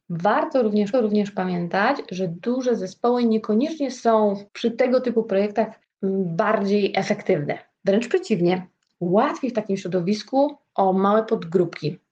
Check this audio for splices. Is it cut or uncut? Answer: cut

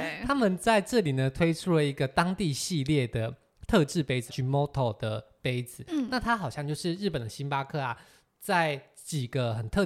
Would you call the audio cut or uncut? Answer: cut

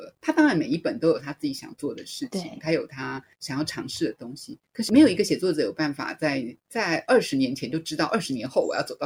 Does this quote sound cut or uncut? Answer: cut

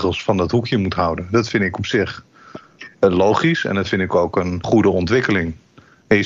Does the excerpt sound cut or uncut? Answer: uncut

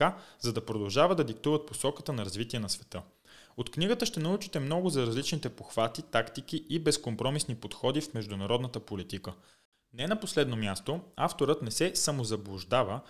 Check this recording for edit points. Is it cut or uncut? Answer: uncut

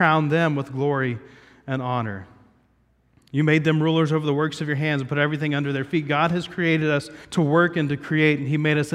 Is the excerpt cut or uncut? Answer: cut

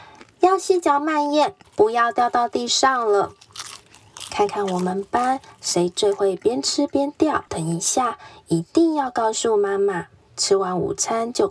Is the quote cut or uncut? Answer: cut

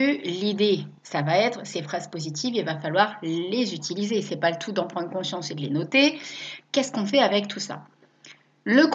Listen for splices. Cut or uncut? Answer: uncut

